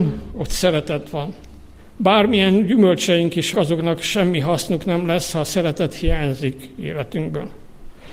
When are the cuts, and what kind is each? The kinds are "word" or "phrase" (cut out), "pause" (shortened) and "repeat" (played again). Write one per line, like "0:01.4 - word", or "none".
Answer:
0:01.8 - pause
0:03.5 - word